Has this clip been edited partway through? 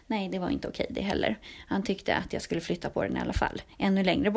no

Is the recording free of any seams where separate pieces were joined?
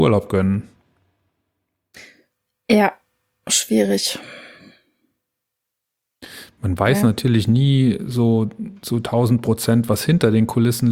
yes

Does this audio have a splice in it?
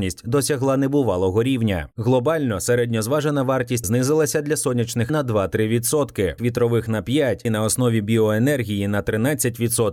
yes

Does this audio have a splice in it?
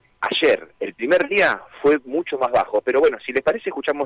no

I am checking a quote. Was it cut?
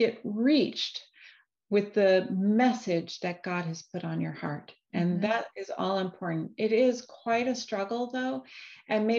no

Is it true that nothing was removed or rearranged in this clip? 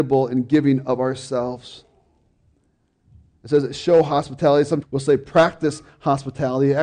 no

